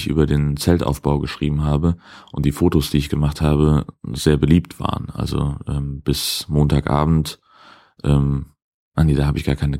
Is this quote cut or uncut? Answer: uncut